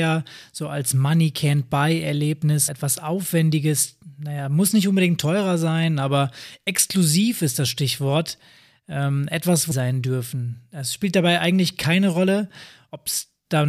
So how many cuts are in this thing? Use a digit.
2